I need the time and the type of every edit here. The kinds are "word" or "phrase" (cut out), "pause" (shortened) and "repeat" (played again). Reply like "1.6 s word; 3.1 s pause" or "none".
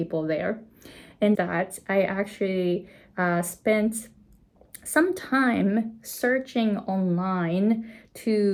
1.3 s phrase